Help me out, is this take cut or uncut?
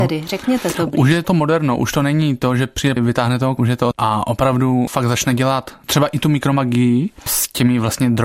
cut